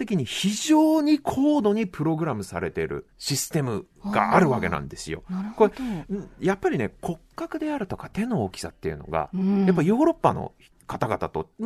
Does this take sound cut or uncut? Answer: cut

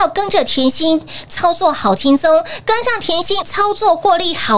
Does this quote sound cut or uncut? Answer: cut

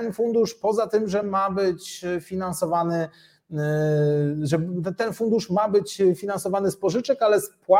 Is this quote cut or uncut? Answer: uncut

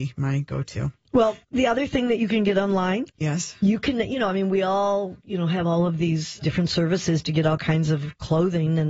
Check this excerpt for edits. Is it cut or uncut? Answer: cut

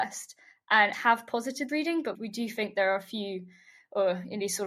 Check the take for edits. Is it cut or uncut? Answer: cut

